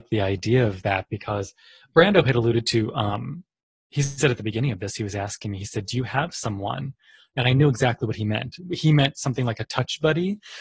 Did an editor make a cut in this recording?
no; 0 cuts

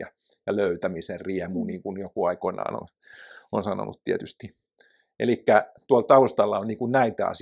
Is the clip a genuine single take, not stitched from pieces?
yes; 0 cuts

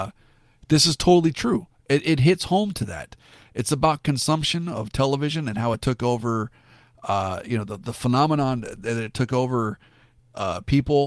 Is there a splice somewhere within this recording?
no; 0 cuts

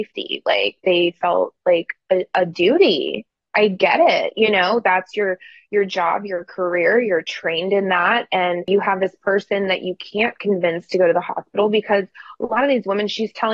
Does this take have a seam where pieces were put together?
no; 0 cuts

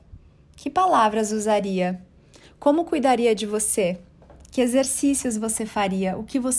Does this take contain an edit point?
no; 0 cuts

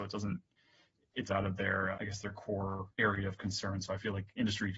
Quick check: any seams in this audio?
yes; 3 cuts; at 1.3 s, 1.9 s, 2.9 s

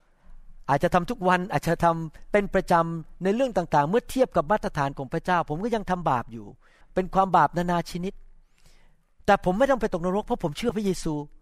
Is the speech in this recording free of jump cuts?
no; 1 cut; at 6.8 s

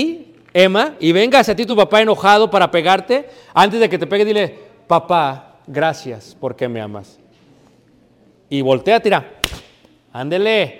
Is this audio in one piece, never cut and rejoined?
yes; 0 cuts

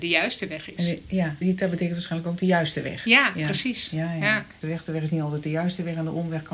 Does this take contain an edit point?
yes; 2 cuts; at 1.4 s, 4.6 s

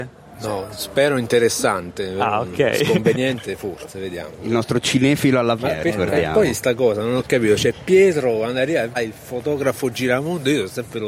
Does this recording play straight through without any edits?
no; 2 cuts; at 5.6 s, 8.9 s

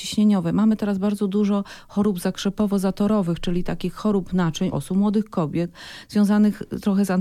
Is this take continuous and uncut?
no; 1 cut; at 4.7 s

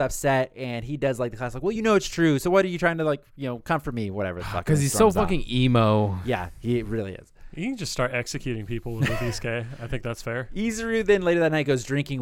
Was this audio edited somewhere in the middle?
no; 0 cuts

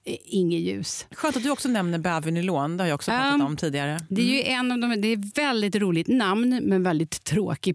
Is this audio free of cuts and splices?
yes; 0 cuts

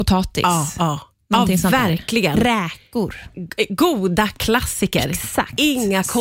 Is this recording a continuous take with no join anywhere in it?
yes; 0 cuts

